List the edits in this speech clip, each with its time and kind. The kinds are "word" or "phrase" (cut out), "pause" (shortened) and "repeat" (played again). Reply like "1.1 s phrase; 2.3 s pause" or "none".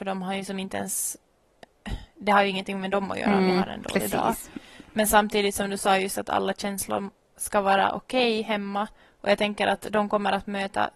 none